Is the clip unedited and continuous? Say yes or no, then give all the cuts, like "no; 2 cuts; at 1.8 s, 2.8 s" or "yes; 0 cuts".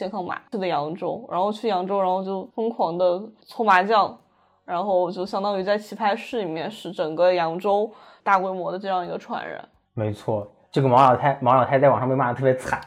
yes; 0 cuts